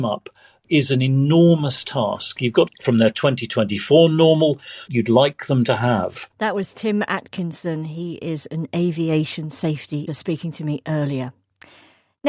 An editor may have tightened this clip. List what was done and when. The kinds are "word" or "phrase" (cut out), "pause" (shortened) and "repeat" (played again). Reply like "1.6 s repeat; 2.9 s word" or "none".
2.7 s phrase; 4.9 s phrase; 6.3 s pause; 10.1 s word